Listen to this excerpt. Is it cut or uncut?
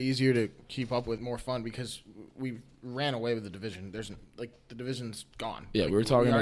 cut